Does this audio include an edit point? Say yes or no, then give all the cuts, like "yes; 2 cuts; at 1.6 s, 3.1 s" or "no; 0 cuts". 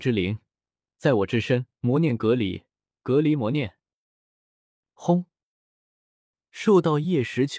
yes; 1 cut; at 1.7 s